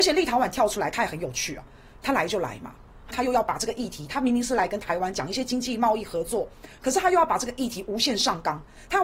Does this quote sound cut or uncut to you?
cut